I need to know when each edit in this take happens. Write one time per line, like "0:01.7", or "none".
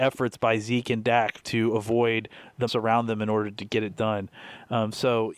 0:02.7